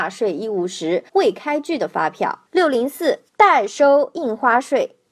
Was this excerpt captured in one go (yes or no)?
no